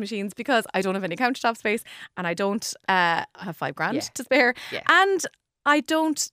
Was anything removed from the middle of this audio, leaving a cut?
yes; 1 cut; at 3.4 s

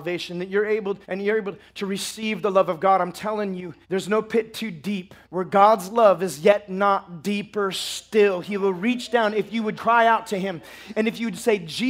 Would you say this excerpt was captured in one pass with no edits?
no; 4 cuts; at 1.0 s, 3.8 s, 5.2 s, 9.8 s

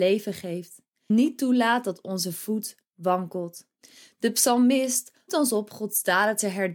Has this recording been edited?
yes; 3 cuts; at 1.1 s, 3.8 s, 5.3 s

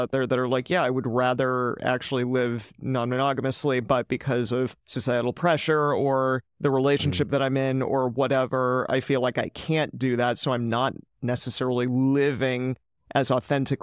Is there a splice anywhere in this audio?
yes; 2 cuts; at 4.8 s, 6.5 s

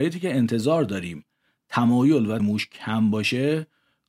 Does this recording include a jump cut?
yes; 1 cut; at 2.4 s

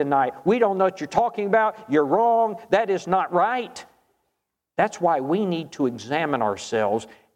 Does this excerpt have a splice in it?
no; 0 cuts

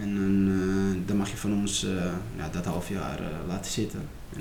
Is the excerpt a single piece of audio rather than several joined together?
yes; 0 cuts

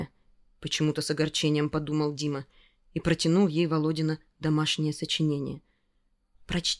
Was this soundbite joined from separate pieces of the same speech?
no; 0 cuts

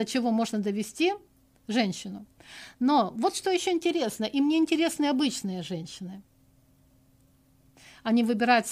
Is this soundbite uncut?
yes; 0 cuts

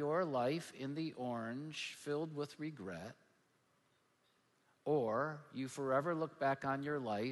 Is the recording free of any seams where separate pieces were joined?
yes; 0 cuts

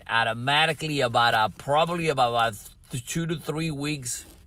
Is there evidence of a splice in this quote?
no; 0 cuts

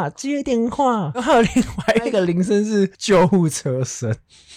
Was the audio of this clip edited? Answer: yes; 1 cut; at 2.9 s

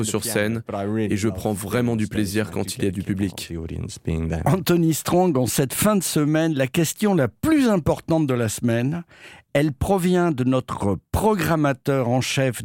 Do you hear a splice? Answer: no; 0 cuts

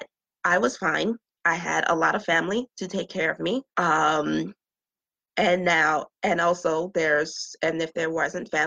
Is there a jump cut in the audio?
yes; 3 cuts; at 1.3 s, 2.7 s, 3.7 s

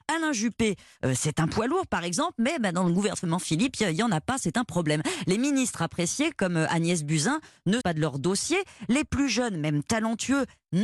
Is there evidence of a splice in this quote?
yes; 1 cut; at 7.8 s

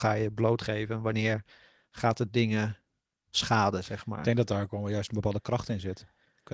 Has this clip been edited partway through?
no; 0 cuts

